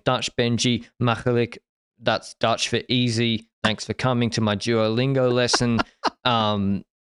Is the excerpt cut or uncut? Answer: uncut